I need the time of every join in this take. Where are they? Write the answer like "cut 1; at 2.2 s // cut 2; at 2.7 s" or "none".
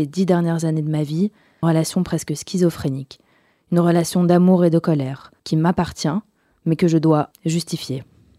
cut 1; at 1.6 s // cut 2; at 5.4 s // cut 3; at 7.3 s